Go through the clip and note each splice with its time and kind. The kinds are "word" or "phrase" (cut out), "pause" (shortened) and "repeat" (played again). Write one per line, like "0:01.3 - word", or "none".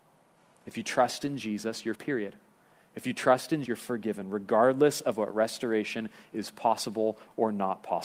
0:01.9 - word
0:02.6 - pause
0:03.7 - word